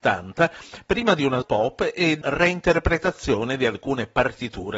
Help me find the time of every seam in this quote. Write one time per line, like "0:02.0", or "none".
0:01.4
0:02.2